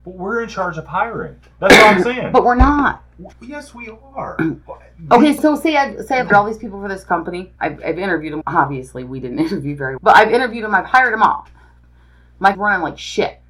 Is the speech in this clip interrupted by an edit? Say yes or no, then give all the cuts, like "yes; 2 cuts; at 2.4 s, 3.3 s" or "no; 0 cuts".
yes; 8 cuts; at 3.3 s, 4.6 s, 5.4 s, 6.3 s, 7.6 s, 8.4 s, 10.0 s, 12.5 s